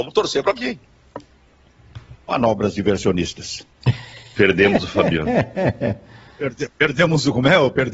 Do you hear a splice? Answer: yes; 1 cut; at 3.7 s

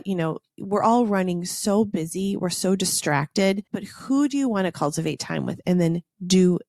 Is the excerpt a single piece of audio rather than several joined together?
no; 1 cut; at 3.7 s

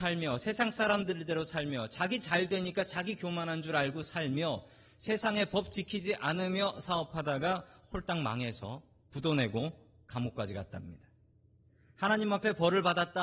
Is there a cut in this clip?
no; 0 cuts

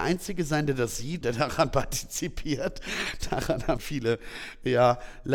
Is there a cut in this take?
yes; 2 cuts; at 1.2 s, 3.8 s

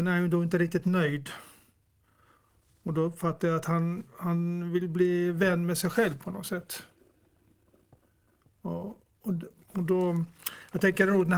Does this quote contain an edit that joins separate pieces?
no; 0 cuts

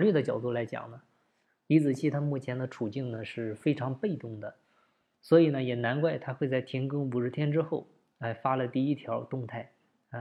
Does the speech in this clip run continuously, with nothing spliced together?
yes; 0 cuts

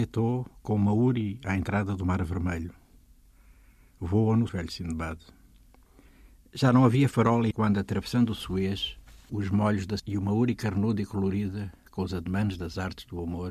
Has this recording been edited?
yes; 4 cuts; at 4.5 s, 7.5 s, 9.3 s, 10.0 s

